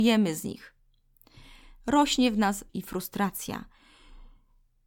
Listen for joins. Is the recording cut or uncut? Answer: cut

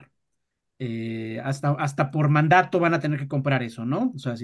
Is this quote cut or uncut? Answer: uncut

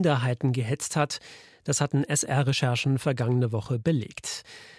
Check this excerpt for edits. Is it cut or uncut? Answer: uncut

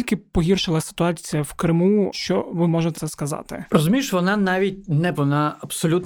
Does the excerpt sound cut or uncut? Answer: cut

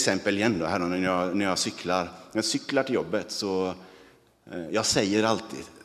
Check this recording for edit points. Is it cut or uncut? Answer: uncut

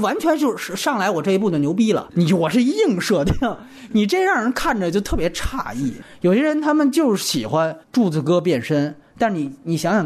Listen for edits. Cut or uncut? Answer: cut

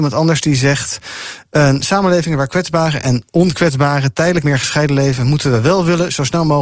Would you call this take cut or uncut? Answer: cut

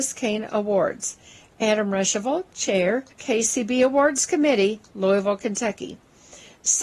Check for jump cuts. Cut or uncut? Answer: cut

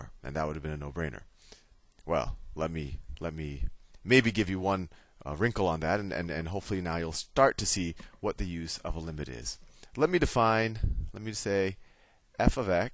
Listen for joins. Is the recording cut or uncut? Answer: uncut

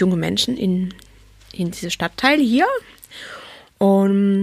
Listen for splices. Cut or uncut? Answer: uncut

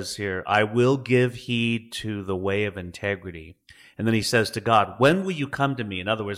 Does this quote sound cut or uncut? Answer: uncut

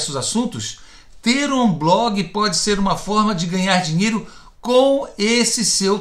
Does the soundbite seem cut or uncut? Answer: uncut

